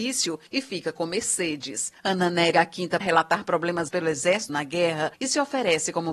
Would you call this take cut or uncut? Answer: cut